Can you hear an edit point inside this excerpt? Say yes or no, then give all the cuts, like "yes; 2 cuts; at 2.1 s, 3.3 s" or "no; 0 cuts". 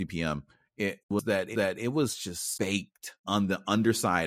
yes; 4 cuts; at 1.0 s, 1.5 s, 2.5 s, 3.2 s